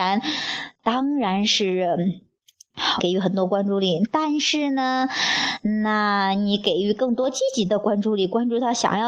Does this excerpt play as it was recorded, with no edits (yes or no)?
no